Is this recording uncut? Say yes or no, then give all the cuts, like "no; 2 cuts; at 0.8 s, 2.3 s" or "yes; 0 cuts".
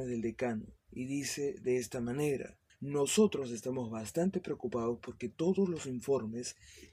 no; 1 cut; at 2.7 s